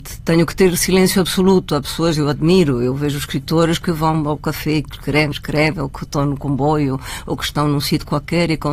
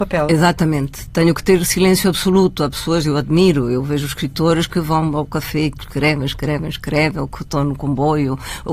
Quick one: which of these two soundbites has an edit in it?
first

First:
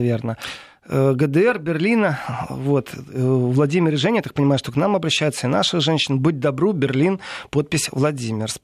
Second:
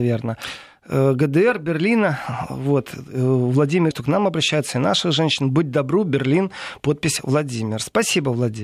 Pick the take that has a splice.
second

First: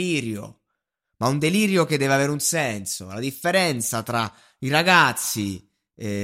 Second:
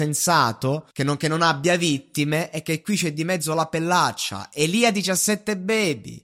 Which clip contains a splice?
second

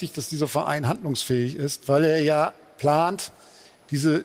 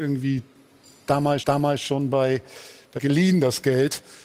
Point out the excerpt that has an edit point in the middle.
second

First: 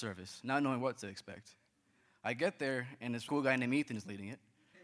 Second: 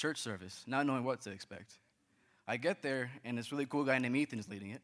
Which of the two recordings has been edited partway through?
first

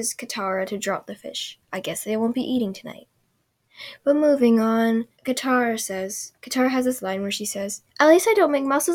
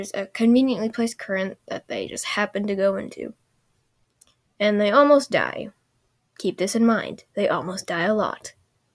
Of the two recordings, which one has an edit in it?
first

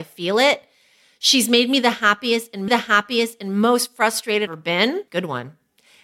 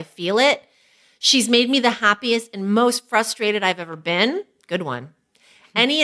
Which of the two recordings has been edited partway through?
first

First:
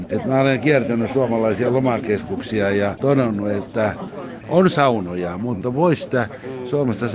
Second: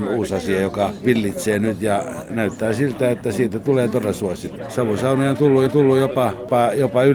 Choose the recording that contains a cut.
second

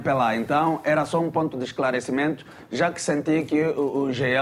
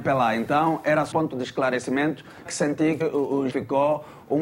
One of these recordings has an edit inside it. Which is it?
second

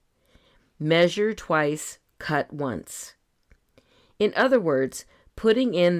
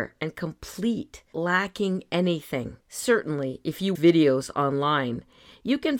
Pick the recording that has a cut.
second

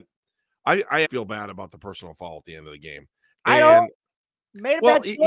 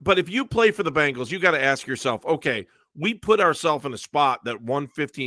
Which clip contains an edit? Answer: first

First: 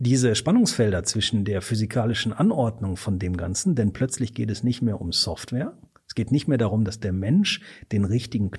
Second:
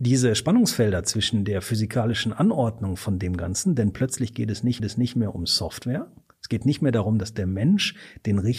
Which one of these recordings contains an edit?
second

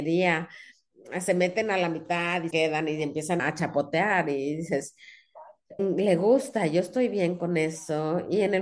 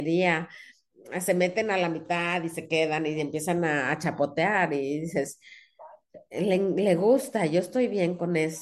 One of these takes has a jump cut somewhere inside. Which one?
first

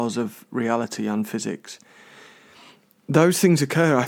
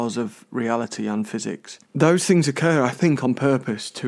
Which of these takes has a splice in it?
second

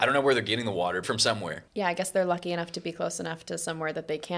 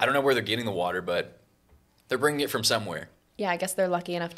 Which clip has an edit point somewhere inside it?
first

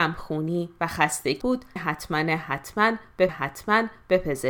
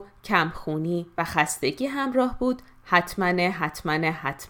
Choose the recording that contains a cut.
first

